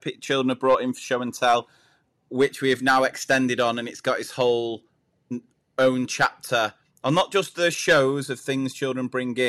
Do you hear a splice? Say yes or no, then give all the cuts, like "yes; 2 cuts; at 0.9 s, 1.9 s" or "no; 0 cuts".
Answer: no; 0 cuts